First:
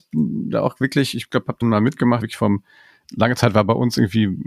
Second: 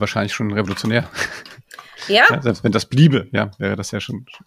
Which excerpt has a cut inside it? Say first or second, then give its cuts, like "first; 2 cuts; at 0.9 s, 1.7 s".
first; 3 cuts; at 1.6 s, 2.2 s, 3.1 s